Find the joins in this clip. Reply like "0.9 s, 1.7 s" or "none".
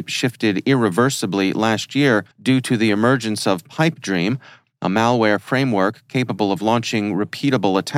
2.3 s